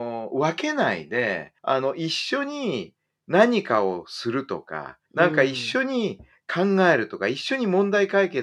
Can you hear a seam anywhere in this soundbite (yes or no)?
yes